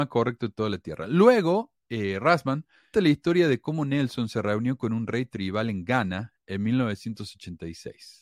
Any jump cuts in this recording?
yes; 2 cuts; at 1.8 s, 2.9 s

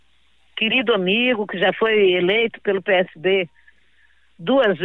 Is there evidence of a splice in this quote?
no; 0 cuts

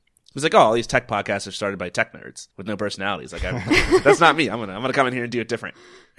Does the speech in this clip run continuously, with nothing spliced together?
no; 1 cut; at 2.5 s

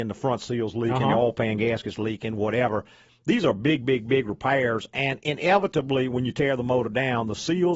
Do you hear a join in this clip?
no; 0 cuts

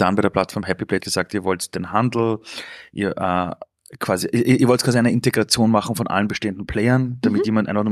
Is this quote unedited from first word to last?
no; 1 cut; at 1.0 s

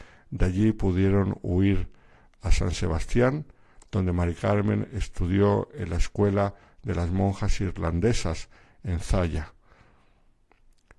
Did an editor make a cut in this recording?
no; 0 cuts

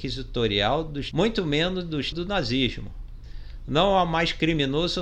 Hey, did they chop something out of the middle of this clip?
yes; 2 cuts; at 1.1 s, 2.1 s

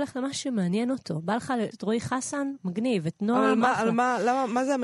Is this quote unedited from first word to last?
no; 1 cut; at 1.7 s

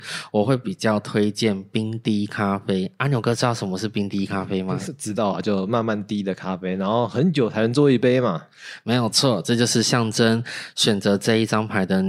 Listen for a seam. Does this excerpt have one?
no; 0 cuts

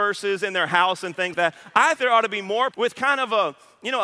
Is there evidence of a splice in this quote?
yes; 3 cuts; at 1.3 s, 2.0 s, 2.7 s

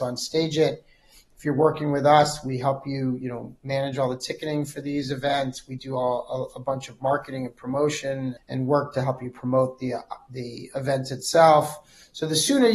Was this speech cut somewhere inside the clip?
yes; 1 cut; at 8.4 s

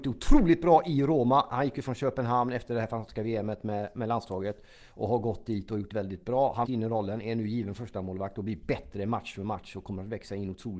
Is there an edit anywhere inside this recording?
yes; 2 cuts; at 5.9 s, 6.6 s

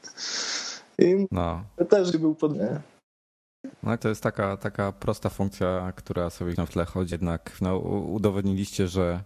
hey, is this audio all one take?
no; 6 cuts; at 2.1 s, 2.5 s, 4.0 s, 6.5 s, 7.1 s, 7.6 s

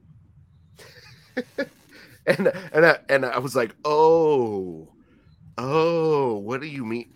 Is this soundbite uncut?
yes; 0 cuts

